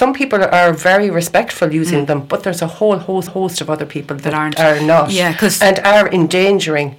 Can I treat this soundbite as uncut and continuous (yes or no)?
no